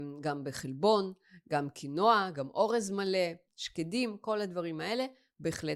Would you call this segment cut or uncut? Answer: cut